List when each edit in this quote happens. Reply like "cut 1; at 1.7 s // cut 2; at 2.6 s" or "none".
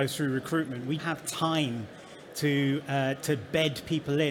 cut 1; at 1.0 s